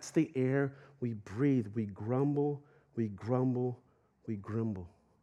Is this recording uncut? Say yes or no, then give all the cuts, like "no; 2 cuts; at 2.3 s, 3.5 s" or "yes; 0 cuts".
yes; 0 cuts